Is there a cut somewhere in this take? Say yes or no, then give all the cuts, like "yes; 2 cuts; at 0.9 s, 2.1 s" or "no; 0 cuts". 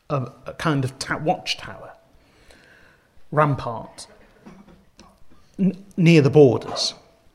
no; 0 cuts